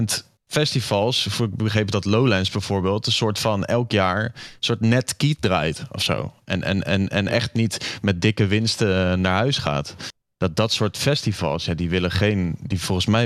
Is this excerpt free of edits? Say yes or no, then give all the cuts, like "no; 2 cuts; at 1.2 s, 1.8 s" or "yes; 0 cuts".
yes; 0 cuts